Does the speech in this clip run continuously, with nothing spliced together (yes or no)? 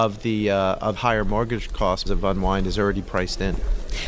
no